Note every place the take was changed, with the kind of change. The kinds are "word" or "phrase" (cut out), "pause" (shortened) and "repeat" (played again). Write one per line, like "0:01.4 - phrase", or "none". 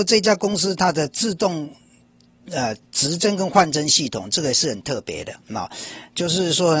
none